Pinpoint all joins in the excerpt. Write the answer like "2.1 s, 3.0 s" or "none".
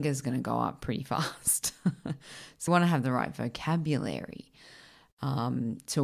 2.7 s